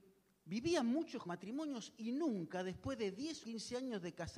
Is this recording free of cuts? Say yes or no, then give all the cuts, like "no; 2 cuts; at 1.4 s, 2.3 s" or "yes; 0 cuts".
no; 2 cuts; at 1.3 s, 3.4 s